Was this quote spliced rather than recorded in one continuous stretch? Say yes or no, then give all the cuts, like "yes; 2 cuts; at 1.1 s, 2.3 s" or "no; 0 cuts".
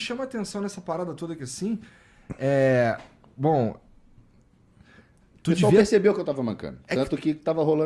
no; 0 cuts